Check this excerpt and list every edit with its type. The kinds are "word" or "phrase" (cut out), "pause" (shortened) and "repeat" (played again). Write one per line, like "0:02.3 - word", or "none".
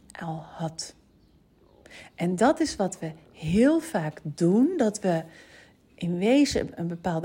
none